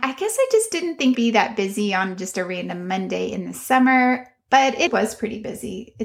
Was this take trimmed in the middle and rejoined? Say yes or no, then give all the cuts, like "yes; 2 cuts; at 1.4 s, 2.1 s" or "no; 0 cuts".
yes; 2 cuts; at 1.1 s, 4.9 s